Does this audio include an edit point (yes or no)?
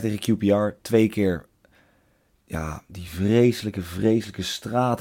no